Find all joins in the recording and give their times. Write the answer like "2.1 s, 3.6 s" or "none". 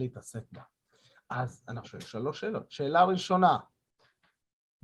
1.8 s